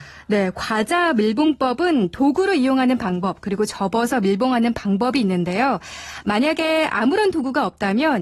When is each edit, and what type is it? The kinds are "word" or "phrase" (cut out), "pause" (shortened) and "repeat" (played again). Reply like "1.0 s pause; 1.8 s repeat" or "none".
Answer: none